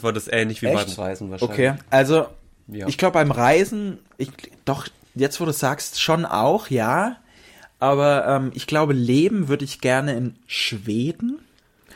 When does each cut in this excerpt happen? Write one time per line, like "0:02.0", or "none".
none